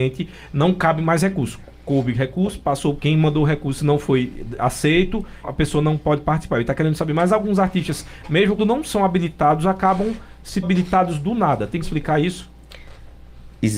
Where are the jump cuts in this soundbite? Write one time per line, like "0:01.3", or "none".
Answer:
0:03.0
0:04.6
0:05.4
0:08.6
0:10.6
0:11.8